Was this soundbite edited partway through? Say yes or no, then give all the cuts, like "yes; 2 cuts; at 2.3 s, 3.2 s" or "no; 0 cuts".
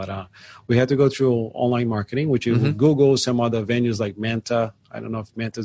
no; 0 cuts